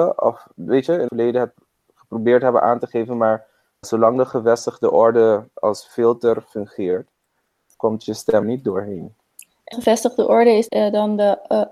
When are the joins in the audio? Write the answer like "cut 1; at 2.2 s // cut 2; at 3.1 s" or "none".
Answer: cut 1; at 1.1 s // cut 2; at 3.8 s // cut 3; at 7.7 s // cut 4; at 8.4 s // cut 5; at 9.7 s // cut 6; at 10.7 s